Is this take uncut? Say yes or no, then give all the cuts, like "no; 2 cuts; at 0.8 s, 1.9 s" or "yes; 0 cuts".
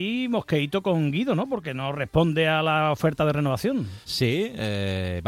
no; 1 cut; at 4.0 s